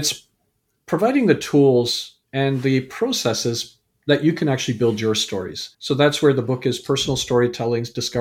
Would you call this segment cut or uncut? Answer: cut